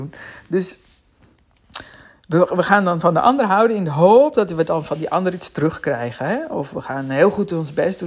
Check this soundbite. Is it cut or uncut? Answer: uncut